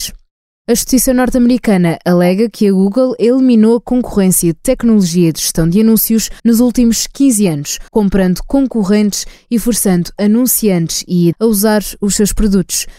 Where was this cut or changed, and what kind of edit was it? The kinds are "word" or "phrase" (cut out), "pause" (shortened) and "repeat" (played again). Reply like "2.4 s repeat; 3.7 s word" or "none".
6.4 s pause; 7.9 s pause; 11.3 s word